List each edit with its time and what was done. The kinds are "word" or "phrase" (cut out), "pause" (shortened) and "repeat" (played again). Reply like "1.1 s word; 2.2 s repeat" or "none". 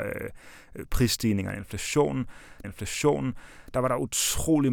2.6 s repeat